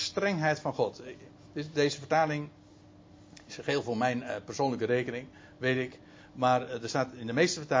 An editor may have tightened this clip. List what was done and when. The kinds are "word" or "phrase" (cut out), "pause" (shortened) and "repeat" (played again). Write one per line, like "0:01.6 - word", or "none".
none